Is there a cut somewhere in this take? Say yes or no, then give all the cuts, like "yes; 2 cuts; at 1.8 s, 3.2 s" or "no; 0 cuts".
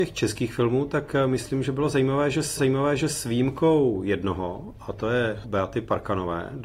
yes; 2 cuts; at 2.6 s, 5.4 s